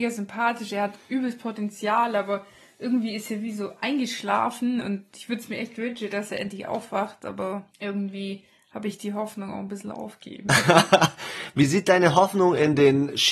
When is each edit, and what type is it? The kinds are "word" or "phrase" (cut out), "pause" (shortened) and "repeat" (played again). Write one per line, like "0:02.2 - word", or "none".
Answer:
0:07.7 - pause